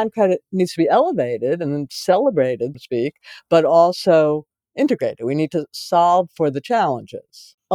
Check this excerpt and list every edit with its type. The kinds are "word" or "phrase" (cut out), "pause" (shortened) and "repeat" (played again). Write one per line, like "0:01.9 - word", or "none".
0:02.7 - word